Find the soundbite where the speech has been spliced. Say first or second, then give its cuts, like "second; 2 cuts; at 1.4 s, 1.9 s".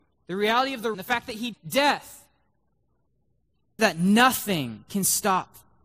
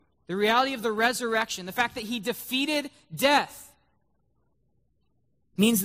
first; 3 cuts; at 0.9 s, 1.5 s, 3.8 s